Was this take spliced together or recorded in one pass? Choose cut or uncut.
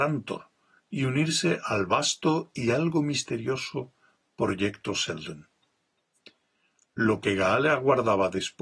uncut